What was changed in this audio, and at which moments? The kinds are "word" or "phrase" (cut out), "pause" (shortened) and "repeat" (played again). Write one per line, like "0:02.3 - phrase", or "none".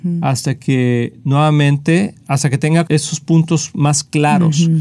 0:02.9 - word